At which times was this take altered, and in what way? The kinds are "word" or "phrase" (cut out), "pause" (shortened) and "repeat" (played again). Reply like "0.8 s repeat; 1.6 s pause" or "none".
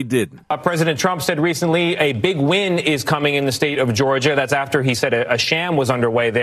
none